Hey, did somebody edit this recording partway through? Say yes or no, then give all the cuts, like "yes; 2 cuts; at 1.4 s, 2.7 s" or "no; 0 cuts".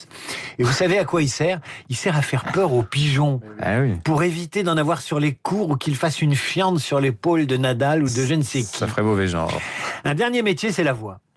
no; 0 cuts